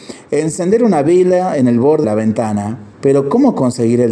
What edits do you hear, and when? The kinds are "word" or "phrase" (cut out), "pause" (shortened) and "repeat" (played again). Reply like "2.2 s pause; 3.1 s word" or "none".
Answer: 2.0 s word; 2.9 s pause